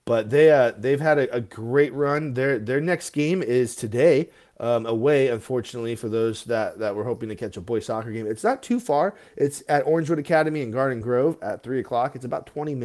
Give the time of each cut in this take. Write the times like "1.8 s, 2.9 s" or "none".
none